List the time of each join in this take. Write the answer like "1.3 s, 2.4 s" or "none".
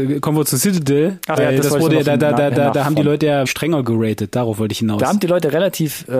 1.4 s, 3.5 s